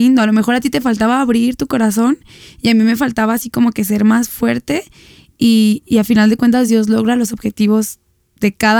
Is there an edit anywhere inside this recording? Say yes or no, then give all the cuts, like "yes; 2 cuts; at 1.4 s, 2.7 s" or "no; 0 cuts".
no; 0 cuts